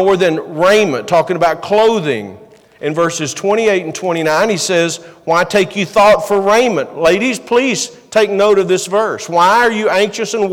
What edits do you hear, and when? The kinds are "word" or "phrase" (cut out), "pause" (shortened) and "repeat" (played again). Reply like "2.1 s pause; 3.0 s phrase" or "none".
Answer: none